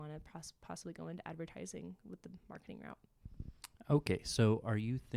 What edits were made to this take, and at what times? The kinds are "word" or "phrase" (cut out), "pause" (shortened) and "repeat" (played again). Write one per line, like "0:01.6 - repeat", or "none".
none